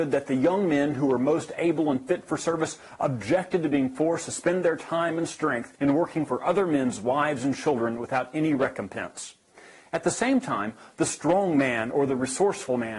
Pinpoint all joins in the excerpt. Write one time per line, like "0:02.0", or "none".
0:05.8